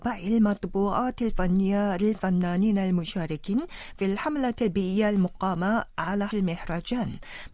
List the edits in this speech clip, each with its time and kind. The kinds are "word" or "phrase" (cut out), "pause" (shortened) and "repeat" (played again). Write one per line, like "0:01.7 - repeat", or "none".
0:06.3 - word